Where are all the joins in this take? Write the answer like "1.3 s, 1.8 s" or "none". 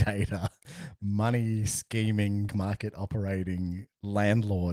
2.5 s